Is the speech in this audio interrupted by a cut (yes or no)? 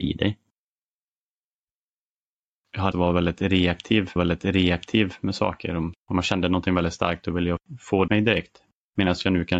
yes